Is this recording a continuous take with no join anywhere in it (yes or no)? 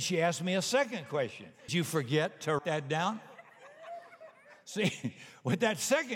no